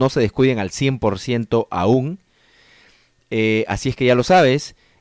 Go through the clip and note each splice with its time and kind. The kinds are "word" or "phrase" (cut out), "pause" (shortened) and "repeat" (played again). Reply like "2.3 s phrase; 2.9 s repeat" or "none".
none